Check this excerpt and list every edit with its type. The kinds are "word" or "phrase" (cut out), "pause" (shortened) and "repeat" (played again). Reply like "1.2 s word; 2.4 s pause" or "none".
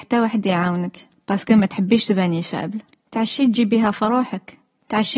none

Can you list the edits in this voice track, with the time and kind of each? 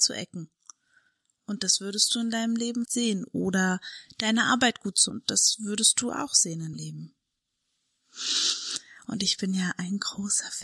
2.9 s word; 5.1 s word; 6.7 s word

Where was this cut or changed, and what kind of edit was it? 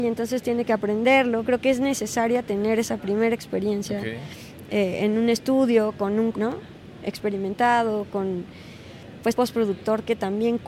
1.4 s word; 6.3 s word; 9.3 s phrase

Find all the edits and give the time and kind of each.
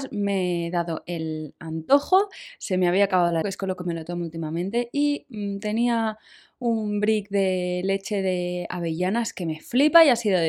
3.4 s phrase

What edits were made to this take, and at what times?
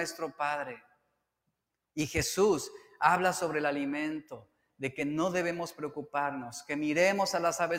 none

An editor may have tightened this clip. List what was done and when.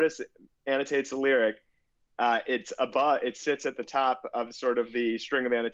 none

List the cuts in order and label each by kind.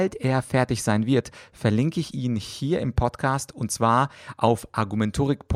none

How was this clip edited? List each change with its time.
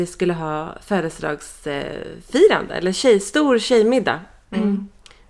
none

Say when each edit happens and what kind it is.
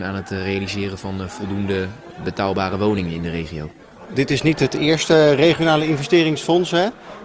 none

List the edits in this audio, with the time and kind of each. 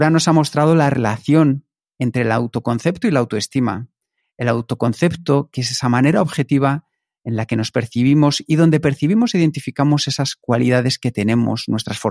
none

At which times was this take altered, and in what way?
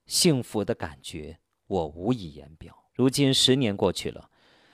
2.9 s pause

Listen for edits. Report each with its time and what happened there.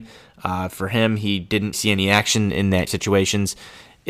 1.7 s word; 2.9 s phrase

